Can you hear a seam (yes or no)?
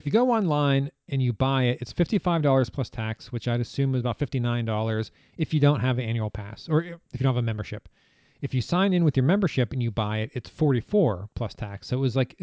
no